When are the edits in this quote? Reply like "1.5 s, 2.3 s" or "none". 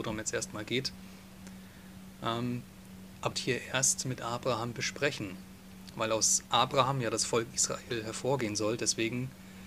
3.3 s